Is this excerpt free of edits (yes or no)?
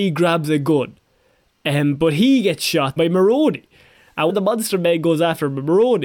no